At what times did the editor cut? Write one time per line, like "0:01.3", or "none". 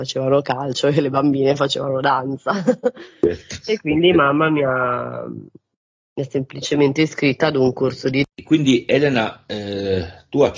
0:08.3